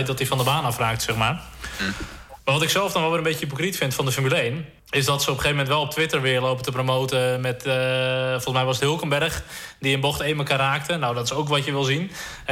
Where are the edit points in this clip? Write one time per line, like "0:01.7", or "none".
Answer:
0:04.8
0:08.8